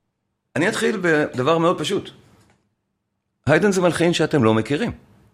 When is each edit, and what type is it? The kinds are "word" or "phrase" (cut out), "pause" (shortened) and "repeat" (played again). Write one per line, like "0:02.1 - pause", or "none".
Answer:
none